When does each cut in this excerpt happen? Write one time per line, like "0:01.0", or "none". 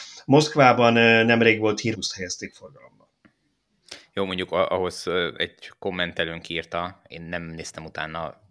0:01.9